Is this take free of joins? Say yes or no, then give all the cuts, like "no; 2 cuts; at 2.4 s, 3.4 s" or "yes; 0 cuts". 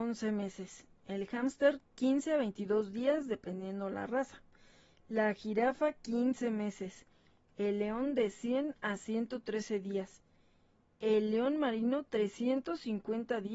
yes; 0 cuts